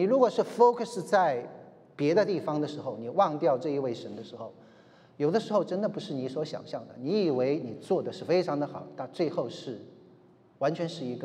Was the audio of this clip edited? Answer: no; 0 cuts

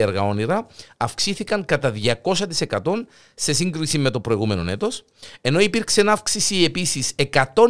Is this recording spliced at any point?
no; 0 cuts

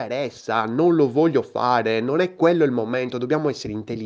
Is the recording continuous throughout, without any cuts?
yes; 0 cuts

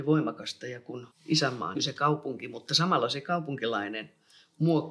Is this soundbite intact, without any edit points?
no; 2 cuts; at 1.1 s, 1.7 s

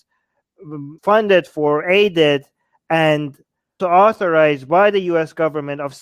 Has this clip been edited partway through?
yes; 2 cuts; at 1.0 s, 3.8 s

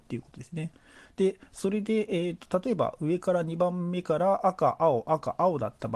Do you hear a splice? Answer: no; 0 cuts

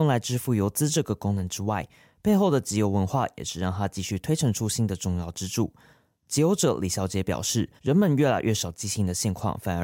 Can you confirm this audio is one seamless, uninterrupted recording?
no; 1 cut; at 7.8 s

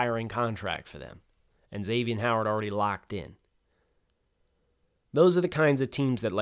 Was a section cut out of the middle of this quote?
no; 0 cuts

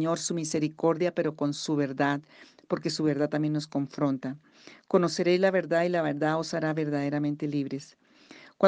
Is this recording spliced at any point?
no; 0 cuts

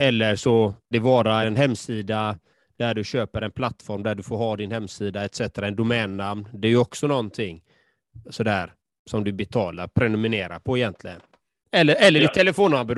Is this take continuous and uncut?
no; 2 cuts; at 0.9 s, 1.4 s

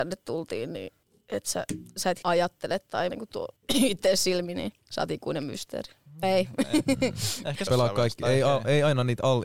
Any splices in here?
yes; 7 cuts; at 1.0 s, 2.2 s, 3.1 s, 3.6 s, 4.8 s, 6.2 s, 7.7 s

